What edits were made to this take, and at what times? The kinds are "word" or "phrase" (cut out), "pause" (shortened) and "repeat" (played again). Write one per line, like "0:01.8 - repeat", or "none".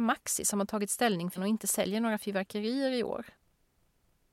0:01.4 - word